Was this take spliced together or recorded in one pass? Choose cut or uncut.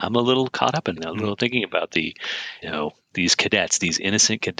cut